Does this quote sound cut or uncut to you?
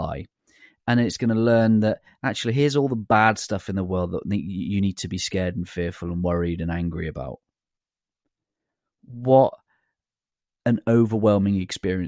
uncut